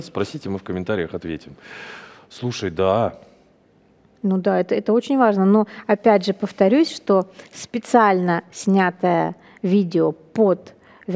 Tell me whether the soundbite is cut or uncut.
uncut